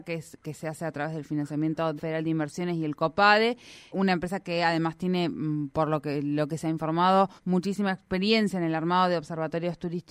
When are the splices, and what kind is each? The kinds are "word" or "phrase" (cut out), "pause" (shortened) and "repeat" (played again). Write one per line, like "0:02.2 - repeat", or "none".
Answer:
0:02.0 - phrase
0:03.9 - word
0:07.4 - pause

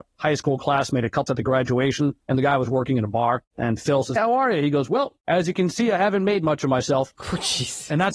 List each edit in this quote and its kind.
0:01.3 - word
0:04.2 - word

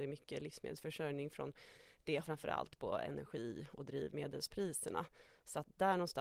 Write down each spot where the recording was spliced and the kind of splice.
0:02.2 - phrase

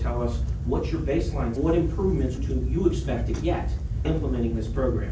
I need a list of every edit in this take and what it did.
0:01.6 - phrase
0:02.4 - phrase
0:04.0 - word

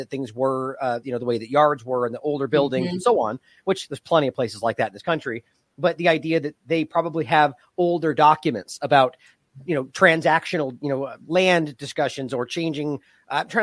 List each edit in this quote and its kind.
none

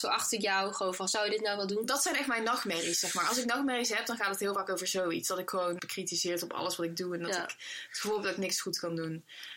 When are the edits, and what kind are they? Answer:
0:05.8 - word

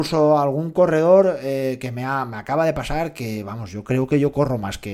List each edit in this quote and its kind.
none

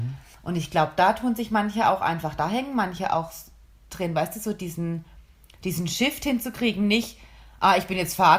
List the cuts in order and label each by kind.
none

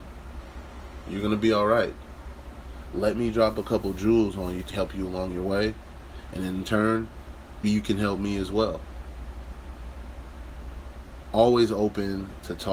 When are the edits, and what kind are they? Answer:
0:04.7 - word
0:07.6 - word

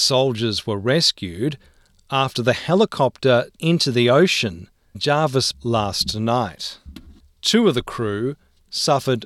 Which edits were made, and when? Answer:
0:03.6 - word
0:04.9 - word
0:05.5 - word

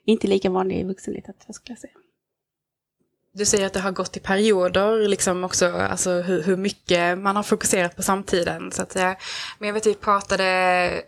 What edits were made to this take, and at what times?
none

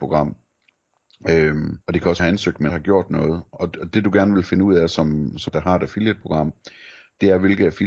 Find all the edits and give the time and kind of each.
0:01.8 - pause
0:02.2 - phrase
0:02.7 - word
0:05.5 - word

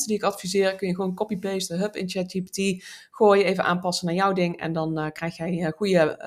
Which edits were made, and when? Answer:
none

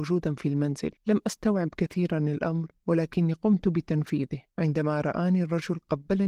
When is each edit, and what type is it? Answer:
0:01.0 - pause
0:02.8 - pause
0:04.5 - pause

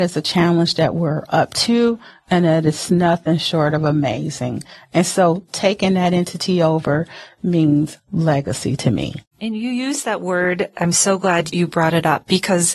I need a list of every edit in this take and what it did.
none

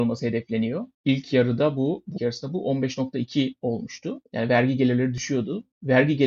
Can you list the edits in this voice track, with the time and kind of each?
0:02.2 - phrase

